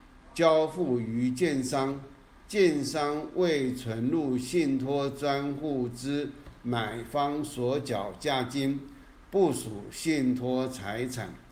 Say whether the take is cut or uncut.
uncut